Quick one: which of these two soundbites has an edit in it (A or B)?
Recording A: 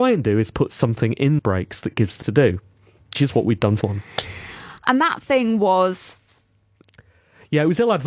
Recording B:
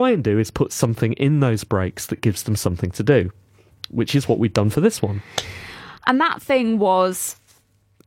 A